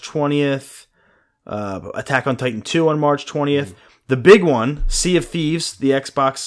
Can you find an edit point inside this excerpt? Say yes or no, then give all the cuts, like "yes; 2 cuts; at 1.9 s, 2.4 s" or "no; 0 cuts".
no; 0 cuts